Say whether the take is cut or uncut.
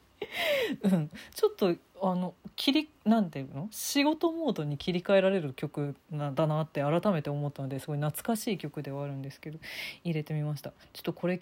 cut